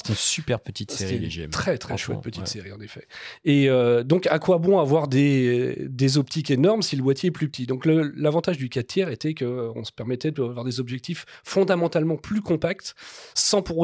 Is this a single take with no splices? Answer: yes; 0 cuts

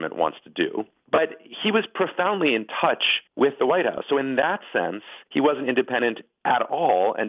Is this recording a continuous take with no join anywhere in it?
no; 2 cuts; at 3.3 s, 5.3 s

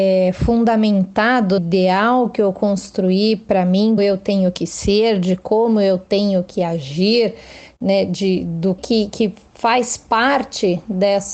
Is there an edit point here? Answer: yes; 3 cuts; at 1.6 s, 4.0 s, 8.8 s

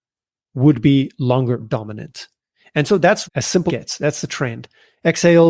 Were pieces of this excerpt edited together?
yes; 3 cuts; at 1.6 s, 3.2 s, 3.7 s

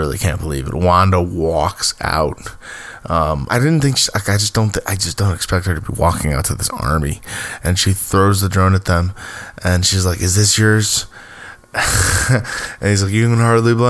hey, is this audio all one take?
no; 1 cut; at 3.5 s

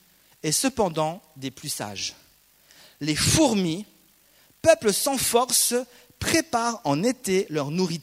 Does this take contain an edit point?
no; 0 cuts

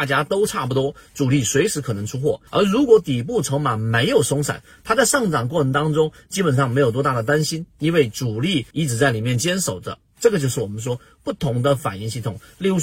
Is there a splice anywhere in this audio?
yes; 2 cuts; at 2.5 s, 8.7 s

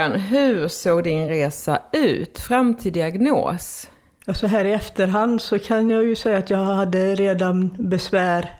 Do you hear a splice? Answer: no; 0 cuts

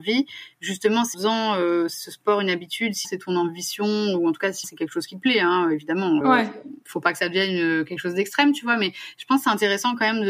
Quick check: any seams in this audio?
yes; 4 cuts; at 1.1 s, 3.0 s, 4.6 s, 6.2 s

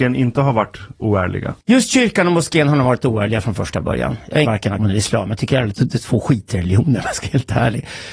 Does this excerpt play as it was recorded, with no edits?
no; 4 cuts; at 1.6 s, 4.4 s, 4.8 s, 5.7 s

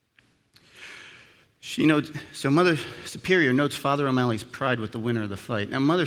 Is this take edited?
no; 0 cuts

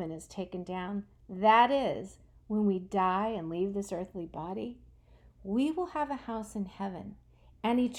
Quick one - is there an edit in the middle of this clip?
no; 0 cuts

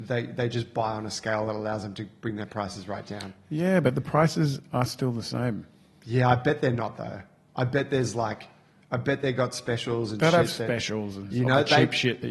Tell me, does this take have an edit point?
no; 0 cuts

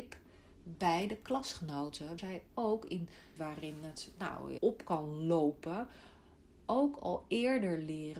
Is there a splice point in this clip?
yes; 3 cuts; at 2.2 s, 3.4 s, 4.6 s

